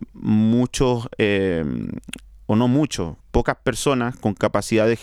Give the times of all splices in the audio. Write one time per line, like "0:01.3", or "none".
0:03.2